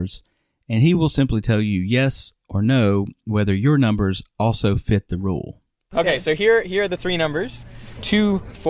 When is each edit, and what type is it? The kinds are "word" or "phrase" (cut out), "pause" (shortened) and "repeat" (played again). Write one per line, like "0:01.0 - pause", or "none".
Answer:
none